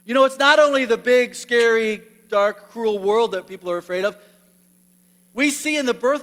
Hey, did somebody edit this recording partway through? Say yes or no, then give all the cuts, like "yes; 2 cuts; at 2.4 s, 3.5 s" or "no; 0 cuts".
no; 0 cuts